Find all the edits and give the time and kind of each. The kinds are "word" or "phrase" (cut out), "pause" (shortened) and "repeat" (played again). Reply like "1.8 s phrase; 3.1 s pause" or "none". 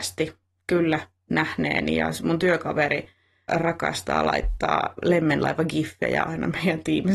3.5 s word